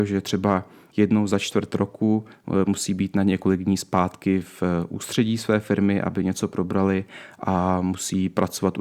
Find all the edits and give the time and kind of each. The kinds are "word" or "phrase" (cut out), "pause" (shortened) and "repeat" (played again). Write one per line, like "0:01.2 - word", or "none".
none